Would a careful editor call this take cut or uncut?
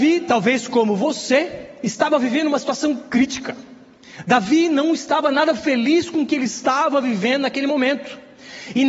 uncut